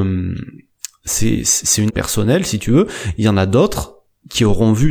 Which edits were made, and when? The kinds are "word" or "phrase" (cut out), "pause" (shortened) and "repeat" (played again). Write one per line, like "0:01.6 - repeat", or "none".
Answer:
0:01.9 - word